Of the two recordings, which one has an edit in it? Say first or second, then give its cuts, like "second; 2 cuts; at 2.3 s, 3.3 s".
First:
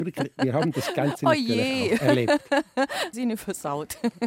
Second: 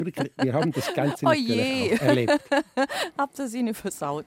first; 1 cut; at 3.1 s